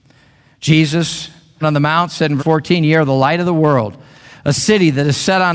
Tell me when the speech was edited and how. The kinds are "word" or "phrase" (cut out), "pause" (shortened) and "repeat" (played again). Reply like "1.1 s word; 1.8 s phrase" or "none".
1.6 s phrase; 2.4 s word